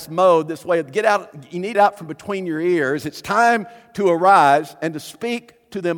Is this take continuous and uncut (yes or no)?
no